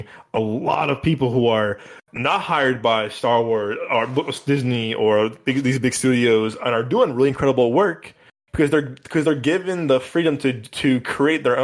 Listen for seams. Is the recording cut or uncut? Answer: uncut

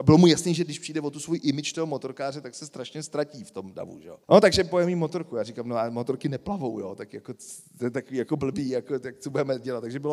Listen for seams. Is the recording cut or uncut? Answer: cut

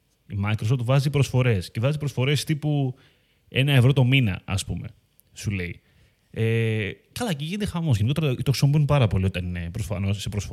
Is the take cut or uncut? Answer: cut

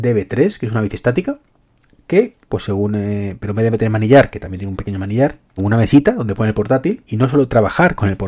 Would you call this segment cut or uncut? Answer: cut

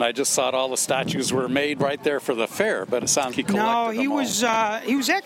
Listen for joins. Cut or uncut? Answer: cut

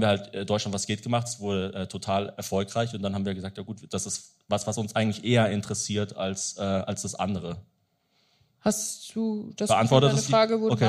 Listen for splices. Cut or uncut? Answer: uncut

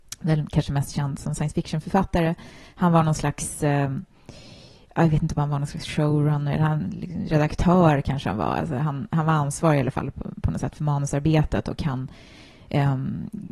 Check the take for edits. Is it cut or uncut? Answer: uncut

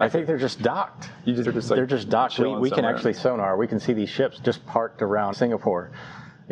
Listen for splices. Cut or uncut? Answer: cut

